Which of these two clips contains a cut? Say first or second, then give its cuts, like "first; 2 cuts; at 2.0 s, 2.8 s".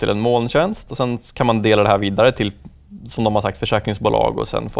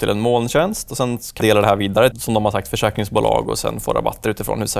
second; 2 cuts; at 1.4 s, 2.1 s